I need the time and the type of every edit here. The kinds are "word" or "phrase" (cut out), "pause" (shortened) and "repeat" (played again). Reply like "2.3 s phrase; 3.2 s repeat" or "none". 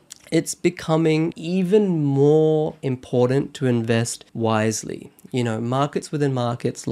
1.3 s word; 4.3 s pause